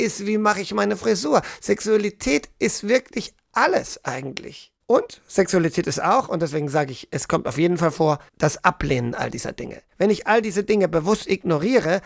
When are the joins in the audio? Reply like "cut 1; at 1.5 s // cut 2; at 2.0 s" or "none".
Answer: cut 1; at 4.8 s // cut 2; at 8.3 s // cut 3; at 9.9 s